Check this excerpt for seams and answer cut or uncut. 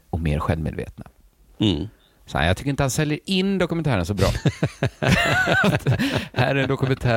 uncut